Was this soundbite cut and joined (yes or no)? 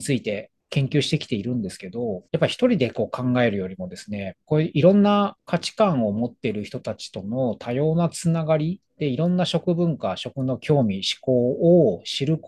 yes